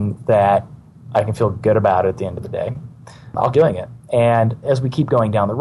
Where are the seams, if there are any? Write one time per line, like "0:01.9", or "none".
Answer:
0:03.5
0:04.6